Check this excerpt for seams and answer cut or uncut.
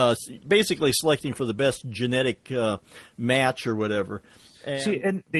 uncut